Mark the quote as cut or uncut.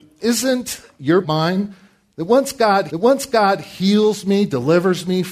cut